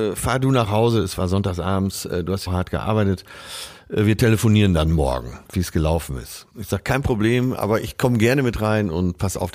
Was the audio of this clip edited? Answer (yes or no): yes